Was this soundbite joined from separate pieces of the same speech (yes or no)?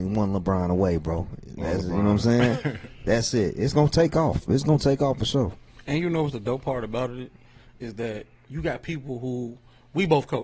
no